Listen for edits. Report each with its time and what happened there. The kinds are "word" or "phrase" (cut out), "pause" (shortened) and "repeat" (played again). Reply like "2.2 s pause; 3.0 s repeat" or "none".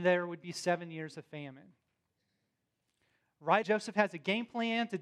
3.6 s word